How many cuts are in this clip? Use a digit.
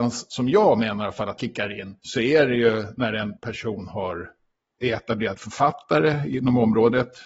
3